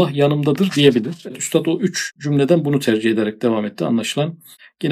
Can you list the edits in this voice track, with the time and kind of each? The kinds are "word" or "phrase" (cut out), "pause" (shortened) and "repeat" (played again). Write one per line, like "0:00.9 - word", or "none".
none